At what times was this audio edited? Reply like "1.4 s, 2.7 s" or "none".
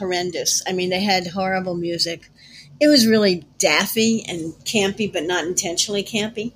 3.5 s, 4.6 s